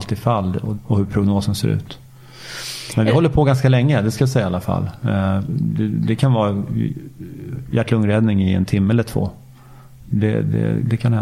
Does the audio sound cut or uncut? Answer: uncut